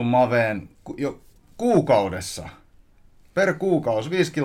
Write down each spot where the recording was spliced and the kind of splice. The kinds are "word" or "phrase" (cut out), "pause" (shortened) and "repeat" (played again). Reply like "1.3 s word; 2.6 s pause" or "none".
none